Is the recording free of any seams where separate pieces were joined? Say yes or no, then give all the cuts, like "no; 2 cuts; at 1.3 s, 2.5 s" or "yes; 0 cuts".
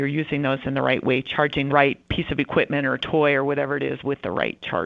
no; 1 cut; at 1.7 s